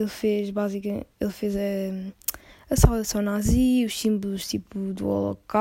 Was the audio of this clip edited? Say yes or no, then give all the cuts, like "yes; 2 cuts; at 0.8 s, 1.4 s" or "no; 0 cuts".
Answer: no; 0 cuts